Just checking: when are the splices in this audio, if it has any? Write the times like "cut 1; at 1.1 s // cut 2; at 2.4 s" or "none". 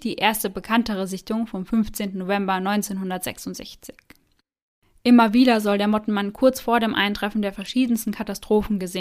none